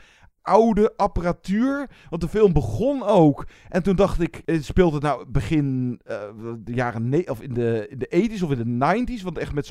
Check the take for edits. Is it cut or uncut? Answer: uncut